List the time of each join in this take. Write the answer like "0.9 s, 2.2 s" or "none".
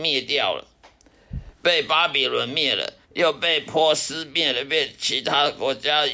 3.0 s